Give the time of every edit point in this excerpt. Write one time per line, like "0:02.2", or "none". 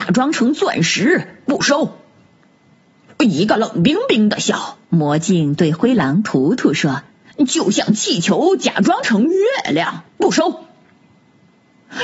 0:04.8
0:07.1
0:10.1